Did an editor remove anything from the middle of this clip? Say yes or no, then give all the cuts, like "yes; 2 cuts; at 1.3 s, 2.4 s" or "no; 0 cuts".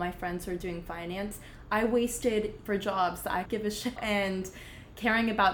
yes; 3 cuts; at 2.7 s, 3.5 s, 4.0 s